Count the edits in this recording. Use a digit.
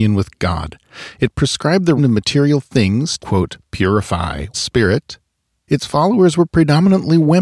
3